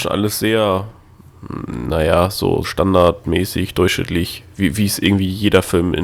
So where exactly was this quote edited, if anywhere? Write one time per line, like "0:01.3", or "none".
0:02.6